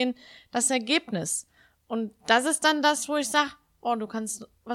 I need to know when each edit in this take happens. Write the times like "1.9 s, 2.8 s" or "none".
none